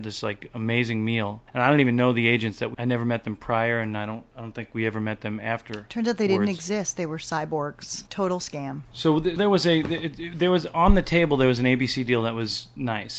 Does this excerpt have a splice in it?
yes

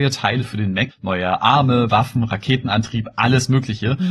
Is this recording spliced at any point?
yes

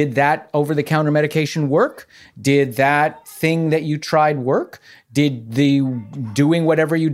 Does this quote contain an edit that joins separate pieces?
no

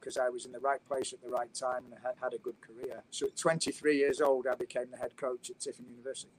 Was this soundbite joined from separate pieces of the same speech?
yes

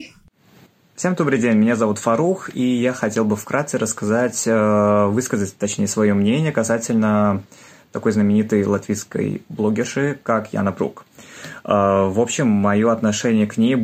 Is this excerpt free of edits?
yes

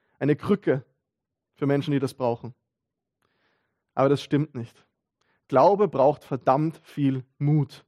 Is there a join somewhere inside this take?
no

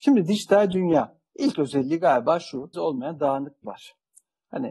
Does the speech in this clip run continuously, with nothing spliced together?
no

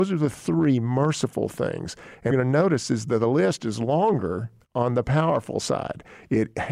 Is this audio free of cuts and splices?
no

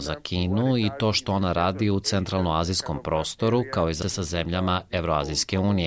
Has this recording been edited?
yes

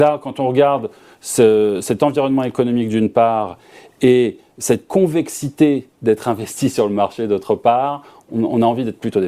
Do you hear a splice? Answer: no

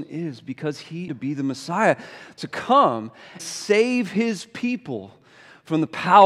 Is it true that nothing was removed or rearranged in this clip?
no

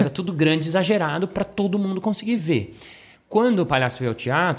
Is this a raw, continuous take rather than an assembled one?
yes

